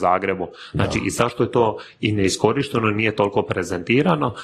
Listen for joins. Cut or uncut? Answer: uncut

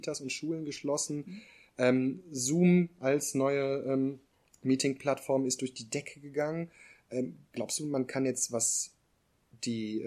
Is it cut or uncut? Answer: uncut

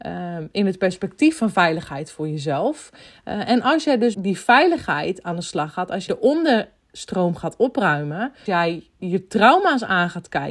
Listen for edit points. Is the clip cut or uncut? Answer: cut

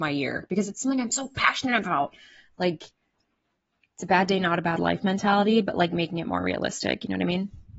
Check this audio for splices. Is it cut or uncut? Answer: uncut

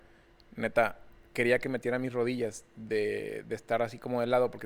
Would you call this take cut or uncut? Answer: uncut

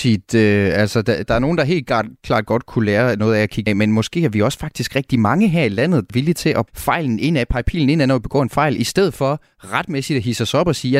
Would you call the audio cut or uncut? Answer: cut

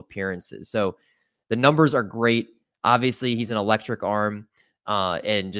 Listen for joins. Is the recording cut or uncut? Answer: uncut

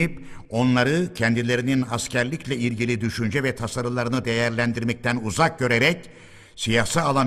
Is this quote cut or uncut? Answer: uncut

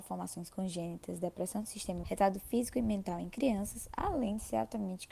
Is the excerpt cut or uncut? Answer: cut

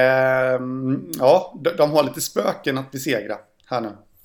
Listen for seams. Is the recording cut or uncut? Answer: uncut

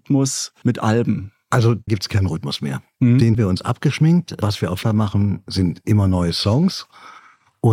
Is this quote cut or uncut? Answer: cut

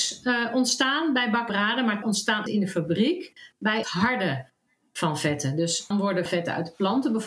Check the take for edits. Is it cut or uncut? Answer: cut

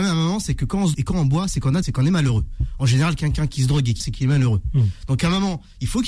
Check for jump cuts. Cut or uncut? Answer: cut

